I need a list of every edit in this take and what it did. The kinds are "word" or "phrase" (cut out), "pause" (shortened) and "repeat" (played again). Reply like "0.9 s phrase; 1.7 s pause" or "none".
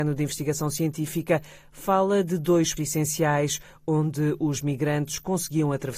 2.8 s word